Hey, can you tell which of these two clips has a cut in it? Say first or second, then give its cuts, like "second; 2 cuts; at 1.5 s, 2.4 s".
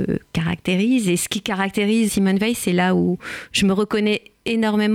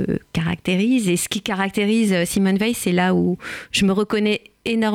first; 1 cut; at 2.1 s